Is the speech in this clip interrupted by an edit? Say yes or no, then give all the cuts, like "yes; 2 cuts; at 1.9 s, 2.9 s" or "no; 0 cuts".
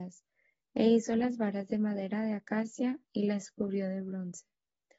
no; 0 cuts